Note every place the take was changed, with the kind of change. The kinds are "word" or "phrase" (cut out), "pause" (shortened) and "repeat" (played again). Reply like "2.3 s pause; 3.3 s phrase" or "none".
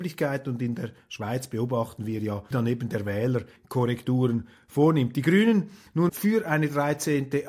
2.5 s word; 3.6 s word; 6.1 s word